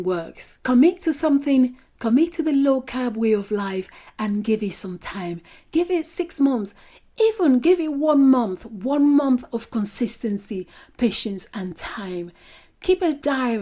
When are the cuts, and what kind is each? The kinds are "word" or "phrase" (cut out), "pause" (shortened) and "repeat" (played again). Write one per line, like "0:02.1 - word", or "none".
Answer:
none